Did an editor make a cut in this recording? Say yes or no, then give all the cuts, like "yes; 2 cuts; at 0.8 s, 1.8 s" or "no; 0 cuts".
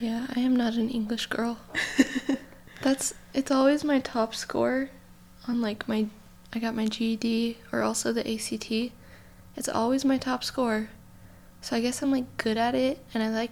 no; 0 cuts